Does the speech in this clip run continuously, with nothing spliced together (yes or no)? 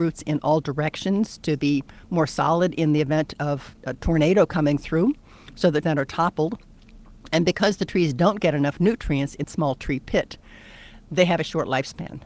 no